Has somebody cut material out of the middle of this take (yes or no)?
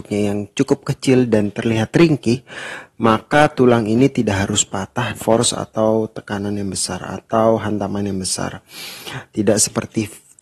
yes